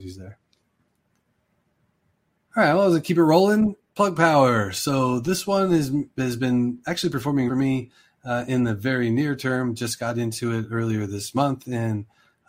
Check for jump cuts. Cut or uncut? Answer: cut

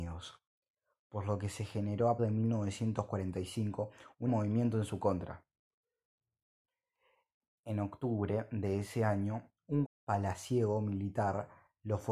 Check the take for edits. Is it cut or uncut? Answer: cut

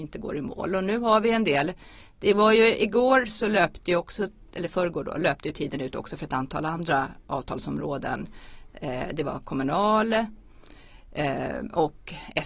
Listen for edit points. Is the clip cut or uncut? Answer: uncut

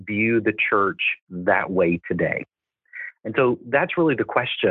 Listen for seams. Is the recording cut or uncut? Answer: uncut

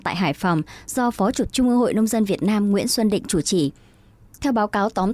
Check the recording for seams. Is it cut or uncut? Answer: cut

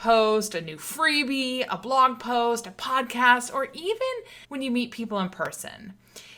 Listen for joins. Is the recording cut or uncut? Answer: cut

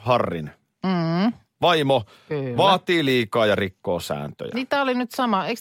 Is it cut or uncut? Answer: uncut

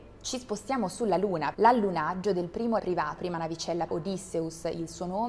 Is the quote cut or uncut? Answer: cut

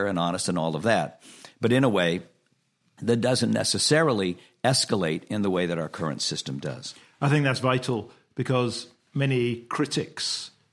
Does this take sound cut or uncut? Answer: uncut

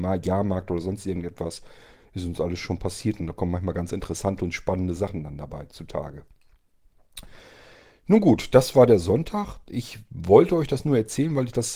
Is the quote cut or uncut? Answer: uncut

